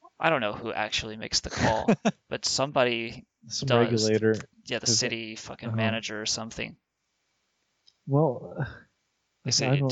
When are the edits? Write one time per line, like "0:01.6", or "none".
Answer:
none